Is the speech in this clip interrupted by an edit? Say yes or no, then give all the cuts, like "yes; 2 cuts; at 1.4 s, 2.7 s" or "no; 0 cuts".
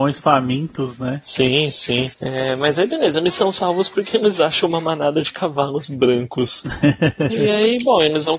no; 0 cuts